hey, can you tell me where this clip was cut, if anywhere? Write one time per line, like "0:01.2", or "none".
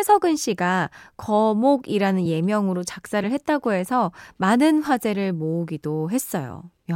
none